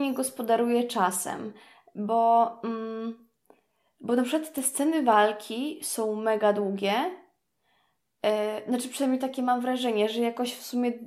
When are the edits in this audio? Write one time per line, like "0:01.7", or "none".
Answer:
none